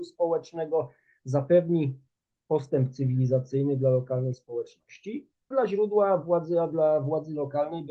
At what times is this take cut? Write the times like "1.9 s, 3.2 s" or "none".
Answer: 5.5 s